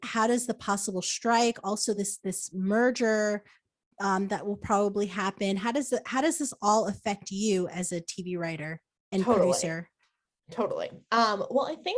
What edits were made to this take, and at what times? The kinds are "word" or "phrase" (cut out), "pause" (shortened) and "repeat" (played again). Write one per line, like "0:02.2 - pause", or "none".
none